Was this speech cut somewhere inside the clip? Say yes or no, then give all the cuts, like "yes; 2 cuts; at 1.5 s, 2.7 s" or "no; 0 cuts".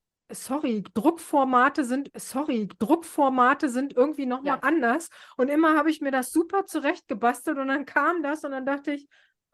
yes; 2 cuts; at 2.1 s, 4.6 s